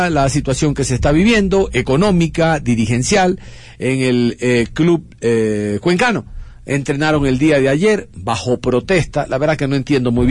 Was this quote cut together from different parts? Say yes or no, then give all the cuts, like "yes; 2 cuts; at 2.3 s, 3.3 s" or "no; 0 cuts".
no; 0 cuts